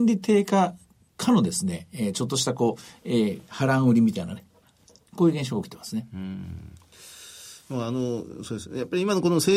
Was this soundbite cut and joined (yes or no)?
no